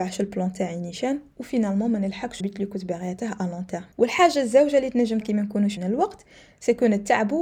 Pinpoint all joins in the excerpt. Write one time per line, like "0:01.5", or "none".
0:02.4
0:03.9
0:05.2
0:05.8